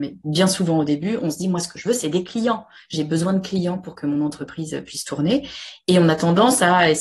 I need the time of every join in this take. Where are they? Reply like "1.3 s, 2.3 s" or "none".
none

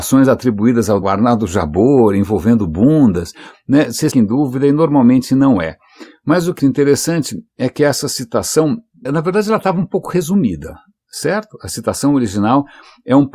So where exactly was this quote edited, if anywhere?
1.0 s, 4.1 s, 6.6 s, 9.1 s

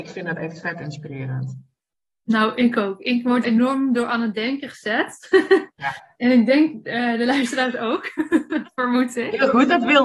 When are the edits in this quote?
3.4 s

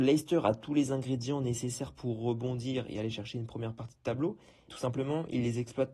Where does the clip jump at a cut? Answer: 4.7 s

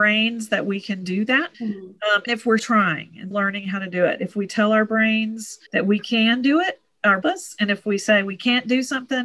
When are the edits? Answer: 1.5 s, 2.3 s, 2.6 s, 3.3 s, 5.7 s, 7.2 s

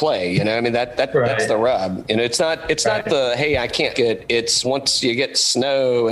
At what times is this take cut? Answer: 3.9 s, 4.6 s

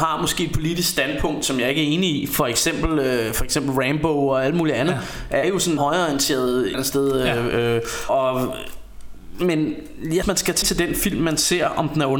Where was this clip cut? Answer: 5.4 s, 5.8 s, 6.7 s, 8.1 s, 10.2 s, 10.6 s

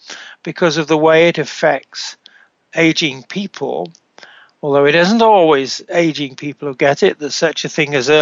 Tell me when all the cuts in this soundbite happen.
none

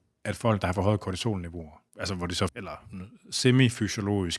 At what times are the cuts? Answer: 1.9 s, 2.5 s

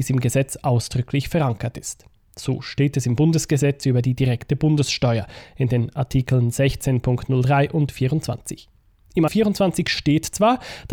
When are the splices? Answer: 9.3 s

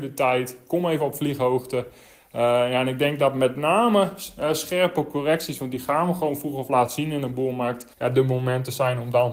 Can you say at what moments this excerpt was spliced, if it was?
7.9 s

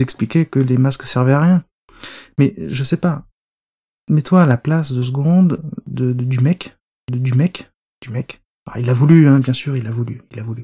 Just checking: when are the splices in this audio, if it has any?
3.8 s, 7.1 s

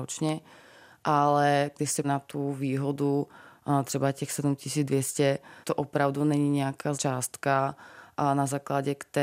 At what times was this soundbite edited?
2.0 s, 5.6 s, 6.9 s

